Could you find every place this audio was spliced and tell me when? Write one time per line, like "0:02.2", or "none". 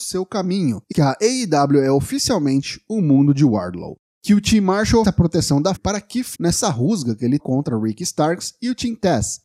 0:00.9
0:05.0
0:05.8
0:06.3
0:07.4

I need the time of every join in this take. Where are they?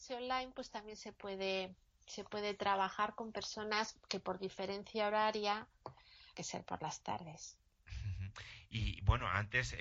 0:01.8
0:06.4

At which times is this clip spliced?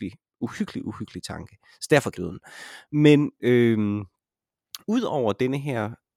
0:02.1
0:04.8

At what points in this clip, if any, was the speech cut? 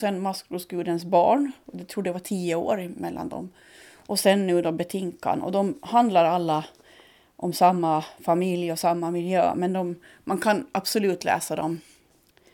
none

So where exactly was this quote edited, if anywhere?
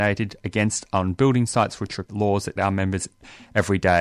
0:02.0
0:02.6

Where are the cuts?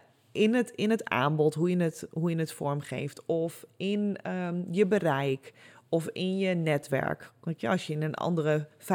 none

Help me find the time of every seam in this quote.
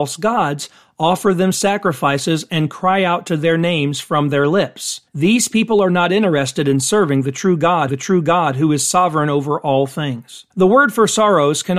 0:05.1
0:07.9
0:10.5

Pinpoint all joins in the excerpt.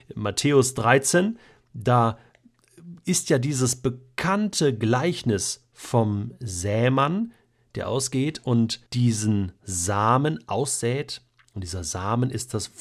0:08.9

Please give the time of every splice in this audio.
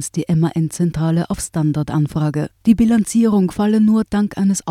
0:02.6

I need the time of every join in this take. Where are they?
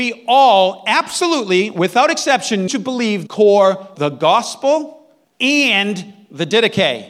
0:02.7
0:03.3
0:03.9
0:05.2

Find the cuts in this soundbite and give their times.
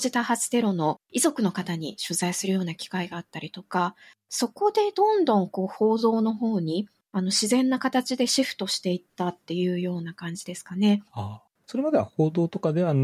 0:11.1

